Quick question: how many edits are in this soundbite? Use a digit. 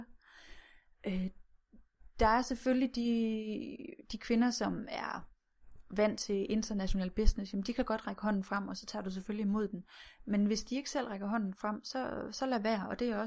0